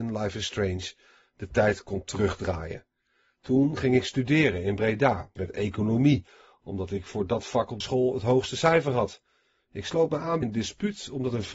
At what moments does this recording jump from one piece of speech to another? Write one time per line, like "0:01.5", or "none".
0:05.4
0:07.8
0:10.4